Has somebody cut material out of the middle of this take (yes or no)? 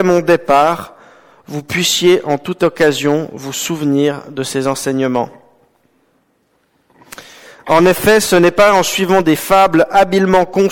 no